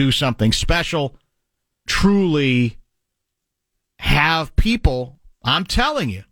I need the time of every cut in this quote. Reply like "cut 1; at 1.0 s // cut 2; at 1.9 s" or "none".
cut 1; at 1.9 s